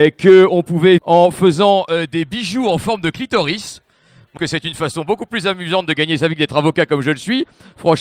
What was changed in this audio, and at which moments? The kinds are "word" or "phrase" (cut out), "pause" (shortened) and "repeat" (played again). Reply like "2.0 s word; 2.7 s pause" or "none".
1.0 s word; 4.4 s phrase